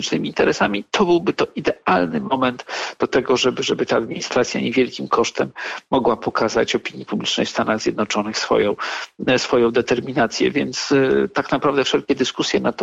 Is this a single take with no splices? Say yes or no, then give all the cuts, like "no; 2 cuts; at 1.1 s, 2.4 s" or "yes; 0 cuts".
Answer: yes; 0 cuts